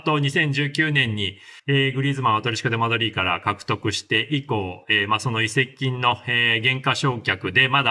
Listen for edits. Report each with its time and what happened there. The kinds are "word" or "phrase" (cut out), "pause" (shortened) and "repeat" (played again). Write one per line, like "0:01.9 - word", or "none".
0:01.6 - pause

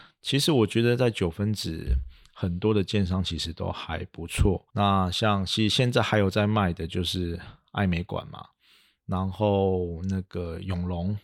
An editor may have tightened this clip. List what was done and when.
0:04.7 - pause

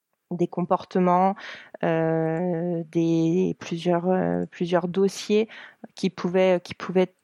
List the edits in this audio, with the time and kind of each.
none

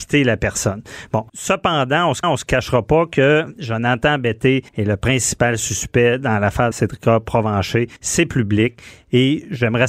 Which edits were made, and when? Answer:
0:01.3 - pause
0:02.2 - repeat
0:04.7 - pause
0:06.7 - word
0:08.0 - pause

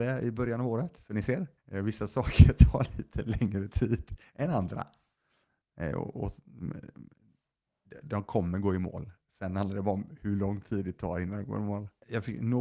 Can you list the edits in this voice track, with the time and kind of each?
0:01.6 - pause

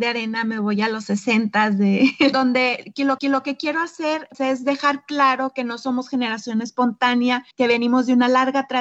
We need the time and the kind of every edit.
0:02.3 - phrase
0:03.2 - repeat
0:04.3 - word
0:07.5 - pause

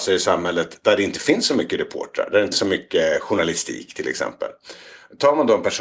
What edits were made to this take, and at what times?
0:02.5 - word

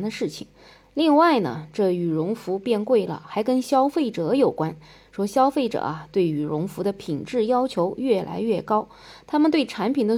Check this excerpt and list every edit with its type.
none

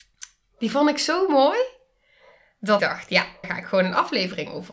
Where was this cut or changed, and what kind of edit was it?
0:02.8 - word
0:03.4 - word

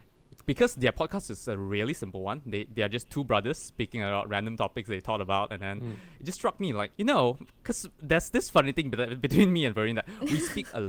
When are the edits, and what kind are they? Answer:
0:06.9 - pause
0:07.9 - pause

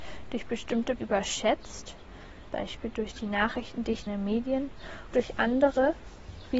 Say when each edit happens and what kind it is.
0:01.0 - word
0:02.4 - word
0:04.1 - word
0:05.1 - word

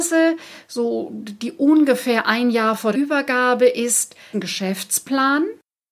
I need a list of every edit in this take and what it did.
0:02.9 - word
0:04.3 - phrase

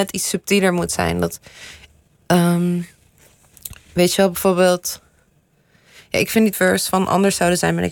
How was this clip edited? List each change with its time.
0:06.5 - word

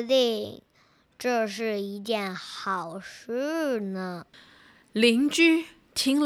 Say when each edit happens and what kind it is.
0:04.3 - pause

